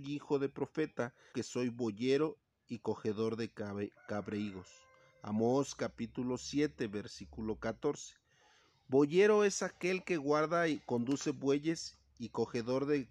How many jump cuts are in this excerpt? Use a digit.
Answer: 1